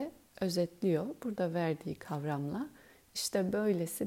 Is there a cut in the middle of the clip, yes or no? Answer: no